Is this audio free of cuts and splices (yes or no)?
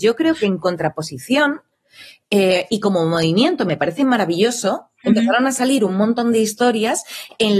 yes